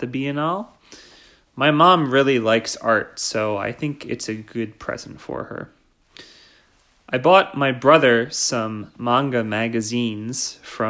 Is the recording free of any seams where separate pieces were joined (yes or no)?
yes